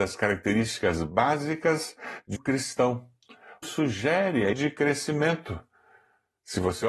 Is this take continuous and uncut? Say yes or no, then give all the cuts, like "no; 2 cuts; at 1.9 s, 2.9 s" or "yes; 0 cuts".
no; 3 cuts; at 2.4 s, 3.6 s, 4.5 s